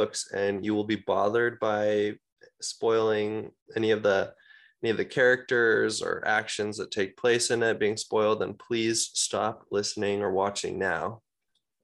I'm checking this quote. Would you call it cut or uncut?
cut